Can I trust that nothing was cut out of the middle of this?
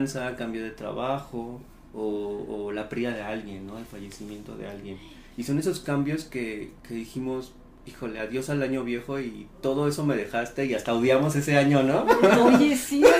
yes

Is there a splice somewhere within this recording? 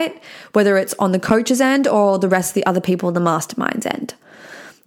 no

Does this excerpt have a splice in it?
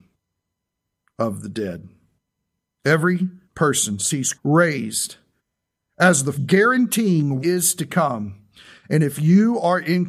yes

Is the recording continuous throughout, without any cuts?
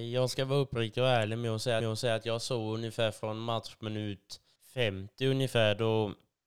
no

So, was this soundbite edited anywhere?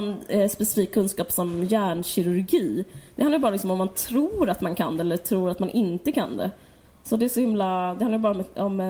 no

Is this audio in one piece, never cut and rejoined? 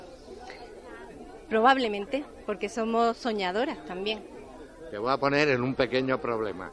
yes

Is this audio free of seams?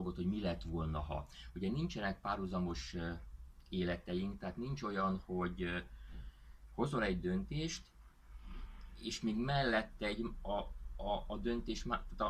yes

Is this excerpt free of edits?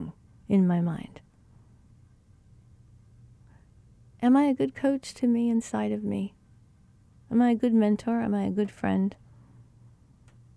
yes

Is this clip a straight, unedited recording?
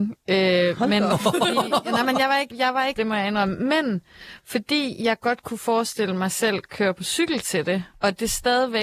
no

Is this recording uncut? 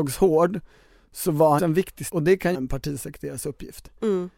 no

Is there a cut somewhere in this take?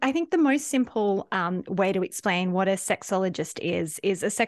no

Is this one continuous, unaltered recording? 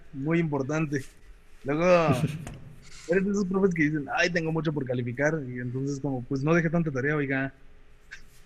yes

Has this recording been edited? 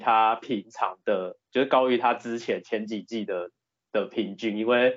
no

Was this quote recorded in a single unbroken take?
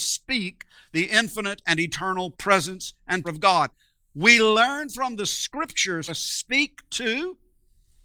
no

